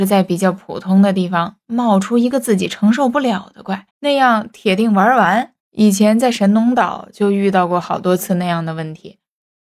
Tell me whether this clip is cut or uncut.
cut